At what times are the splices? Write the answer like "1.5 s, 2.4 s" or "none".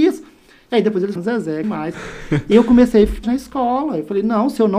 1.2 s, 1.6 s, 2.5 s, 3.2 s